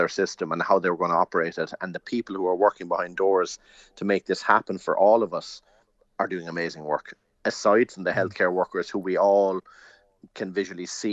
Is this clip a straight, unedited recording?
yes; 0 cuts

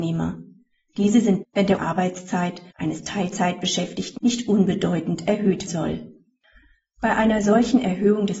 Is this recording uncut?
no; 5 cuts; at 1.4 s, 1.8 s, 2.7 s, 4.2 s, 5.7 s

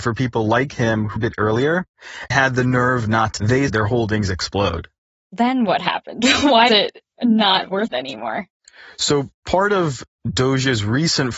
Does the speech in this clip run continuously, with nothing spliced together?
no; 6 cuts; at 1.2 s, 2.3 s, 3.4 s, 3.7 s, 6.7 s, 7.9 s

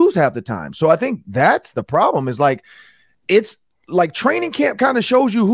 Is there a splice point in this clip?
no; 0 cuts

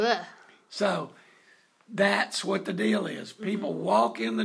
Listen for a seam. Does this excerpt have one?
no; 0 cuts

